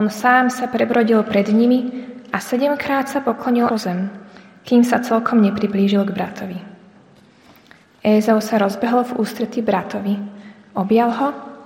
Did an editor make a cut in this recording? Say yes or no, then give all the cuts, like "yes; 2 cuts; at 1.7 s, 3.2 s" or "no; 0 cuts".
yes; 1 cut; at 3.7 s